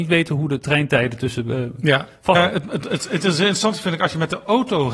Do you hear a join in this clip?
yes; 1 cut; at 2.3 s

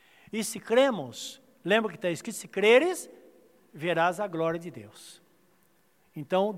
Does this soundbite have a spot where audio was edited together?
no; 0 cuts

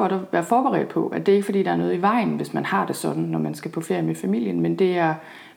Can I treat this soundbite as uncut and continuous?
yes; 0 cuts

